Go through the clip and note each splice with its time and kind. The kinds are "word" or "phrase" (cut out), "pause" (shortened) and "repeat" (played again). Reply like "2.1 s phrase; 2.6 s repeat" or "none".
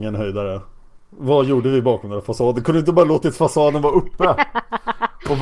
none